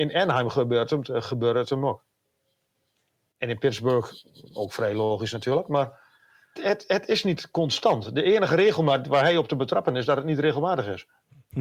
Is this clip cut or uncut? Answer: cut